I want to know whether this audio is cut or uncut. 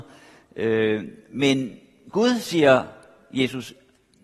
uncut